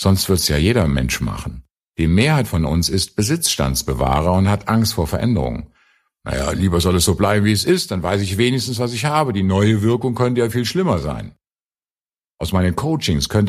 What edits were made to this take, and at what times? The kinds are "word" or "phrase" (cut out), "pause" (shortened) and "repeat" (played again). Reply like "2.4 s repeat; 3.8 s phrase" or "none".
1.7 s pause